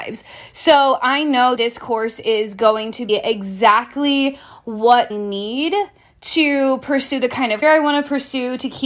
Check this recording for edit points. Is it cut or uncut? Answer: cut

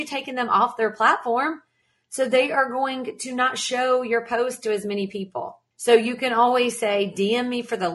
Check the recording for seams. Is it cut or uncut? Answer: cut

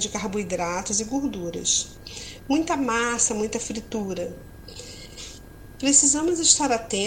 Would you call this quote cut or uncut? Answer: uncut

